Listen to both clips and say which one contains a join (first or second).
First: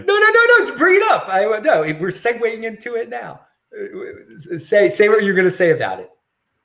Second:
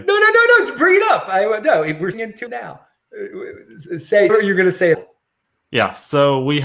second